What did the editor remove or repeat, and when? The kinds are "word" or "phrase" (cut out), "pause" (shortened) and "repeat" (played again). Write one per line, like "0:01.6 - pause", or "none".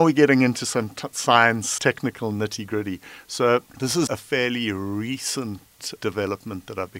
0:01.8 - word
0:03.7 - pause
0:04.1 - word
0:06.0 - word